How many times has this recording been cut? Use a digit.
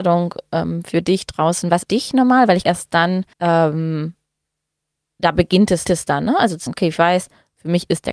5